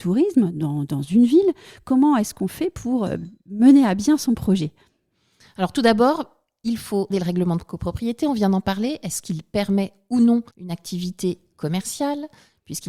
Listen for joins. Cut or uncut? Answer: cut